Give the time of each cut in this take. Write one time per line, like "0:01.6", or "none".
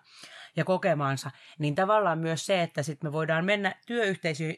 none